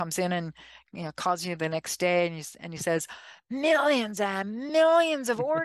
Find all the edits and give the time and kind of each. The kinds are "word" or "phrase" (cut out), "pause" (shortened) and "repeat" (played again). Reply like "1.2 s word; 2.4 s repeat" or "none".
none

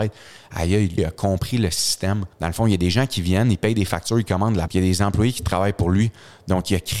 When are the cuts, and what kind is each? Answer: 1.0 s word; 2.3 s pause; 4.7 s word

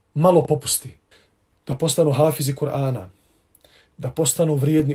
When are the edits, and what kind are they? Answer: 1.1 s pause

